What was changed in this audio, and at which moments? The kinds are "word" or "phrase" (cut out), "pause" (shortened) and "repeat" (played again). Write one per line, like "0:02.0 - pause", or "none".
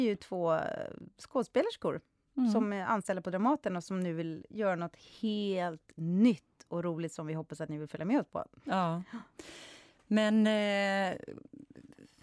none